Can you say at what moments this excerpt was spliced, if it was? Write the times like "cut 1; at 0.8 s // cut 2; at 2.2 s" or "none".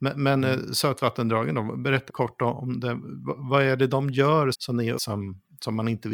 cut 1; at 2.1 s // cut 2; at 4.5 s // cut 3; at 4.9 s